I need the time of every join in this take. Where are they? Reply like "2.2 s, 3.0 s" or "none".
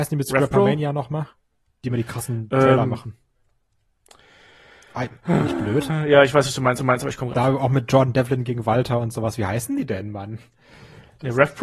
1.5 s, 5.2 s, 6.8 s, 7.3 s